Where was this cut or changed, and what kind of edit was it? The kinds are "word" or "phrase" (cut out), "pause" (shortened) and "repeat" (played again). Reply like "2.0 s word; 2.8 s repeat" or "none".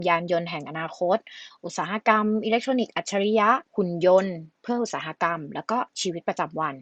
3.7 s pause; 5.9 s pause